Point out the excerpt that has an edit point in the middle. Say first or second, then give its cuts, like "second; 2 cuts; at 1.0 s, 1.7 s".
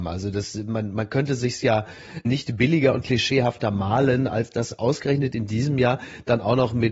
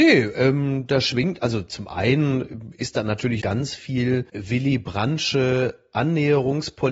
second; 2 cuts; at 3.4 s, 4.3 s